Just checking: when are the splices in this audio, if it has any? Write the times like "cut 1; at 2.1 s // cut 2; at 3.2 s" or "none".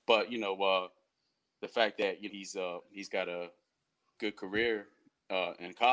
cut 1; at 2.3 s